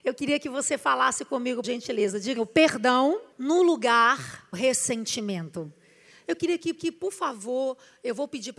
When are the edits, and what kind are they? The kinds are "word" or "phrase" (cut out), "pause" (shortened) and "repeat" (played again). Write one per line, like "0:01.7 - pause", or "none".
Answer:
0:01.6 - word
0:02.4 - word
0:03.3 - pause
0:04.5 - word
0:06.8 - repeat